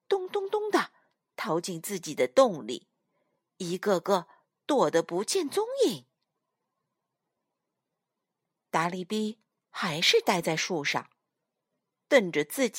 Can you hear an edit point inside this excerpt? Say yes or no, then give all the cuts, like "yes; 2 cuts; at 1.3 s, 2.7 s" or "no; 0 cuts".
no; 0 cuts